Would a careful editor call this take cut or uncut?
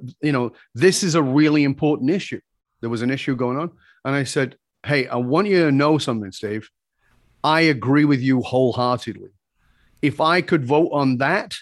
uncut